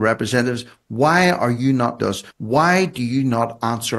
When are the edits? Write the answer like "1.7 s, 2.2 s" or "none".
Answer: 2.0 s, 2.3 s